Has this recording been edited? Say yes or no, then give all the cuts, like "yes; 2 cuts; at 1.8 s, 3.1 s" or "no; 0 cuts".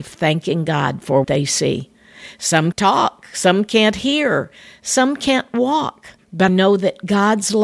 yes; 3 cuts; at 1.2 s, 2.7 s, 6.5 s